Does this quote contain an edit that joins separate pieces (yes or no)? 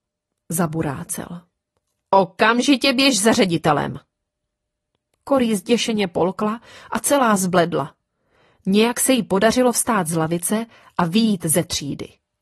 no